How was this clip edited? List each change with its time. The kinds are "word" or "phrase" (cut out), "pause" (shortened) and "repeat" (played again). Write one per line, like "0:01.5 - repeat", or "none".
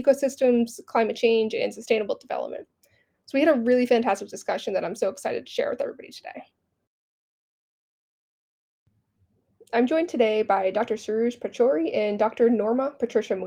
none